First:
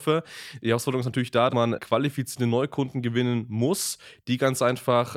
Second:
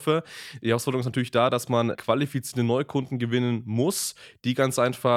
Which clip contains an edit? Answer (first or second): first